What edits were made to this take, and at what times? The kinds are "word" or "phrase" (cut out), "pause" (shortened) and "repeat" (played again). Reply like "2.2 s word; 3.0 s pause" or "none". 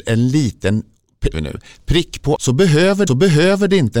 1.3 s phrase; 2.4 s word; 3.1 s repeat